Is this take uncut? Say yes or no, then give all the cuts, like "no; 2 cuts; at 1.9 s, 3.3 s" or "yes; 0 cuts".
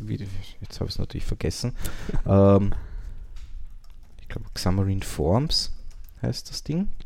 yes; 0 cuts